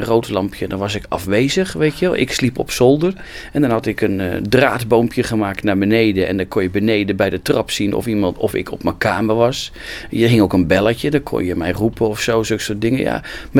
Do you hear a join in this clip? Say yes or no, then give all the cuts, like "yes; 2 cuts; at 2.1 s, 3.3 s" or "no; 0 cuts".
no; 0 cuts